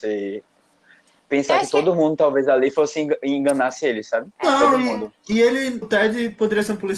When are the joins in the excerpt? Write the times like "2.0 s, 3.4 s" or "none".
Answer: 5.2 s, 5.8 s